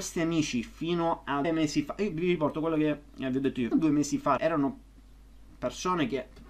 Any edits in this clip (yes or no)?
yes